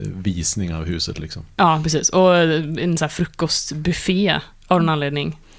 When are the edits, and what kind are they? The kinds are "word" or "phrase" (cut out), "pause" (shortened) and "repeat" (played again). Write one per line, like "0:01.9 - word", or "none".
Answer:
none